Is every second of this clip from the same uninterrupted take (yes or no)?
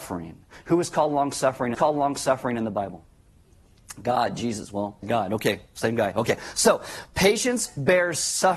no